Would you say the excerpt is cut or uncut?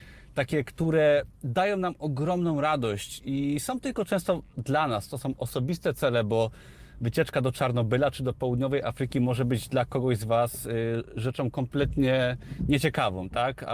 uncut